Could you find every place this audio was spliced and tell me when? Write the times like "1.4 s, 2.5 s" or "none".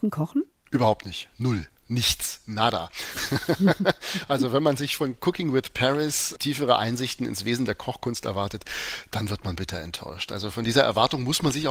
none